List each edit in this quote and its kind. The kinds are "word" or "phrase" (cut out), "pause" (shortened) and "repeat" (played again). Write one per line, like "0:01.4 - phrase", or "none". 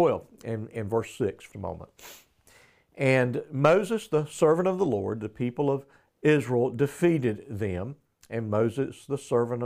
0:01.5 - word